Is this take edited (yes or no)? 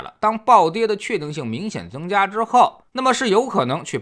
yes